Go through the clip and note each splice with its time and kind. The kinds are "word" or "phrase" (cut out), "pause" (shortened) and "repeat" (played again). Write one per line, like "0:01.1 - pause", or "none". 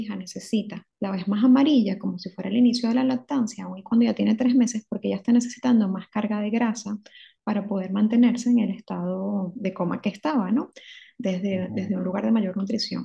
none